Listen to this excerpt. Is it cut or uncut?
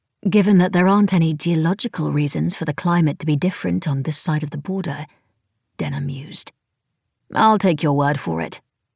uncut